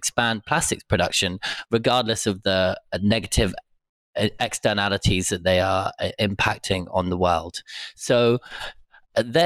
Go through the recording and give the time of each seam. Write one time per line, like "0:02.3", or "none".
none